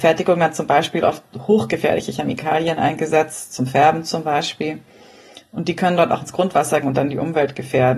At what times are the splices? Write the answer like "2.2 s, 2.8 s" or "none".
6.8 s